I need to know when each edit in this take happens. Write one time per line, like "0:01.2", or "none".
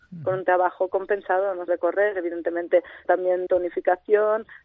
0:01.7
0:03.0
0:03.5